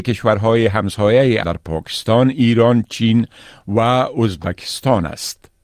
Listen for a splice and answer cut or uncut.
cut